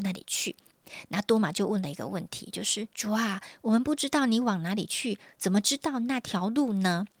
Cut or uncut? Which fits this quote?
uncut